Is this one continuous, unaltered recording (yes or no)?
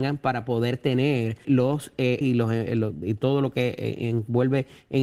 no